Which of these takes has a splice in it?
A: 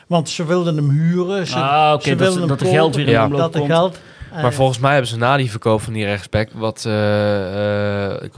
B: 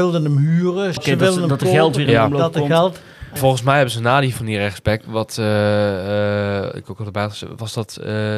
B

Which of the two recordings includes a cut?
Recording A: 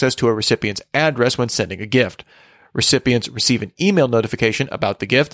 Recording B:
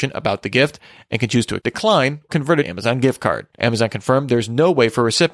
B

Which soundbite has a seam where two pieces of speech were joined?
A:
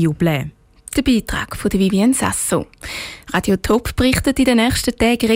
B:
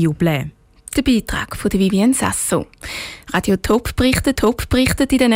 B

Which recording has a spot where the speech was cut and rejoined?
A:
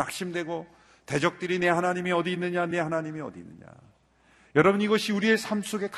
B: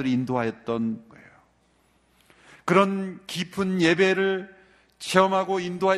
B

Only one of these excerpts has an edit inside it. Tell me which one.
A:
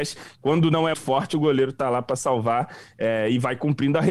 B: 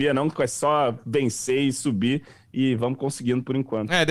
A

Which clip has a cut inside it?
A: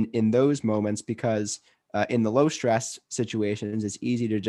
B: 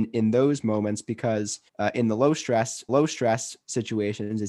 B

